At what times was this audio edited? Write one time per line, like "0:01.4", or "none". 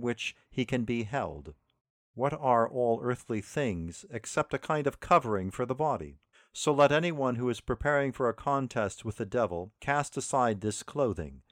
0:01.8
0:06.3
0:09.8